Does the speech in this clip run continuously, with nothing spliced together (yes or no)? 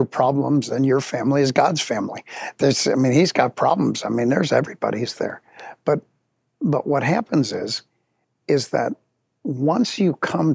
yes